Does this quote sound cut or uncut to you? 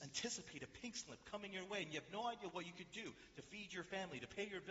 uncut